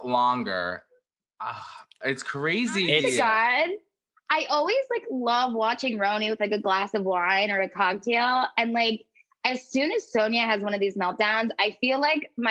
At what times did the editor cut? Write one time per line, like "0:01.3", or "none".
none